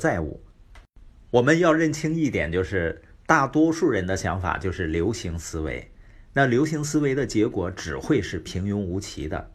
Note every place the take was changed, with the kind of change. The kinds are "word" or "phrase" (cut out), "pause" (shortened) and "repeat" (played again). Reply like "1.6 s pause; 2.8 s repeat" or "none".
none